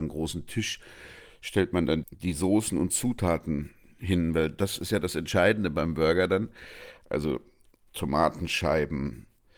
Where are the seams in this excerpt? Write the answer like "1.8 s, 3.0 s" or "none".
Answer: 2.0 s